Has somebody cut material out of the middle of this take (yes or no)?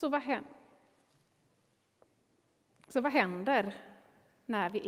no